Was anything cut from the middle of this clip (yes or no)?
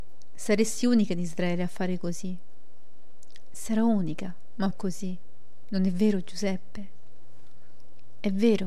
yes